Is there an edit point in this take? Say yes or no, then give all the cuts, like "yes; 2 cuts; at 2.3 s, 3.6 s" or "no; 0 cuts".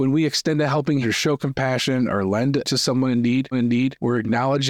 yes; 3 cuts; at 1.0 s, 2.6 s, 3.5 s